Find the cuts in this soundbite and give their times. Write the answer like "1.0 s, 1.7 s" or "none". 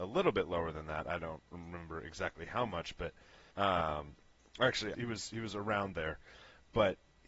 3.5 s, 4.9 s